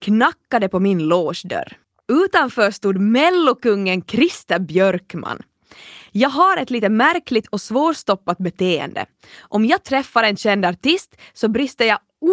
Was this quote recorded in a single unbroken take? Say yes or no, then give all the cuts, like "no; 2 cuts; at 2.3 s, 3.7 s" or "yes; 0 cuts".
no; 1 cut; at 1.8 s